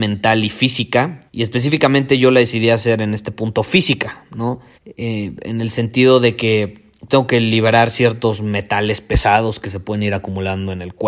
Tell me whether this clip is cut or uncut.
cut